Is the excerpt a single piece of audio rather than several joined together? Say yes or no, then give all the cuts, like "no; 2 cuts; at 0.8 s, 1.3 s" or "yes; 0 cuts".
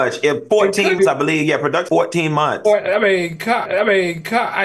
no; 3 cuts; at 1.0 s, 1.9 s, 3.7 s